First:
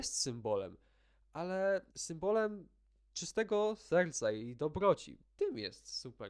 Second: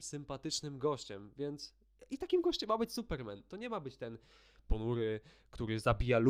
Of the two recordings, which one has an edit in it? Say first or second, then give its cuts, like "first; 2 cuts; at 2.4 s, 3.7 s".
first; 2 cuts; at 1.9 s, 5.2 s